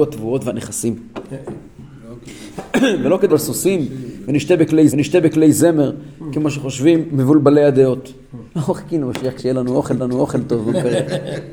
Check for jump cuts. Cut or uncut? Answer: cut